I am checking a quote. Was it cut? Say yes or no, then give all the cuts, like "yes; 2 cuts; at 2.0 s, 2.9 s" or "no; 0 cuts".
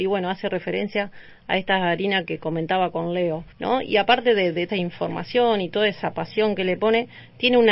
yes; 3 cuts; at 2.2 s, 3.5 s, 4.7 s